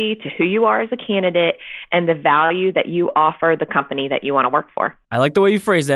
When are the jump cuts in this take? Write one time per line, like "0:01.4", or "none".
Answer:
0:05.0